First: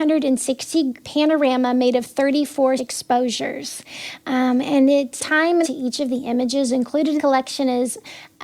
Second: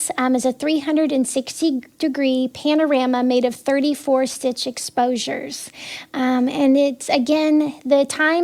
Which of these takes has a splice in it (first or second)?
first